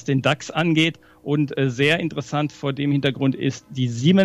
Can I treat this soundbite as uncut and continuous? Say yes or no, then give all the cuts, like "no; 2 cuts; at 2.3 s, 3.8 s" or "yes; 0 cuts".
yes; 0 cuts